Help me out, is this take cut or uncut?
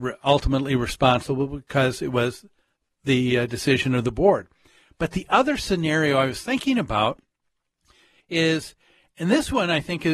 uncut